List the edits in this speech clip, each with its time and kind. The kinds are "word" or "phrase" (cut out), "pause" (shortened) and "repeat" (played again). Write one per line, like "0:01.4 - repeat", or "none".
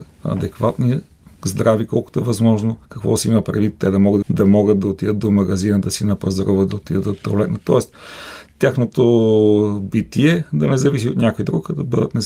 0:02.8 - pause
0:04.2 - phrase